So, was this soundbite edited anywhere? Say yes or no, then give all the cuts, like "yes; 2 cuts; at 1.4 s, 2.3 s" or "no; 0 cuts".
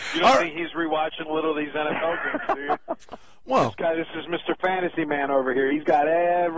no; 0 cuts